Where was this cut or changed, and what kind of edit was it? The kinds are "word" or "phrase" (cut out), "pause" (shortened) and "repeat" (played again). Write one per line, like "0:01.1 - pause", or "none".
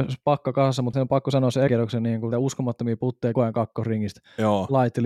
0:00.9 - word
0:01.7 - word
0:02.3 - word
0:03.3 - word